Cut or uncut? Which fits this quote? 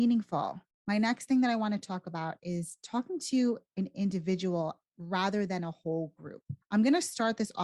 uncut